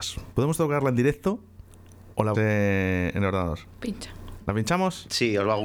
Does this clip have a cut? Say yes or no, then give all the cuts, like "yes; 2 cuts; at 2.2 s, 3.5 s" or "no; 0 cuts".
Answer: yes; 1 cut; at 2.3 s